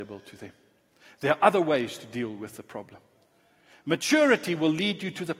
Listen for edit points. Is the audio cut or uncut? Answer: uncut